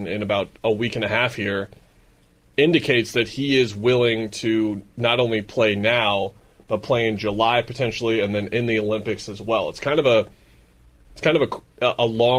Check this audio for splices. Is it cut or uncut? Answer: uncut